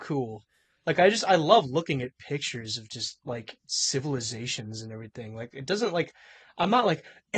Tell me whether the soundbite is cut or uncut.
cut